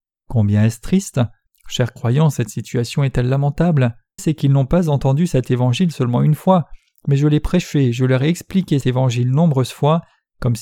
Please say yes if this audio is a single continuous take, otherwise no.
no